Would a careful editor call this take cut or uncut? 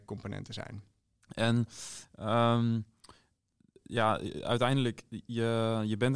uncut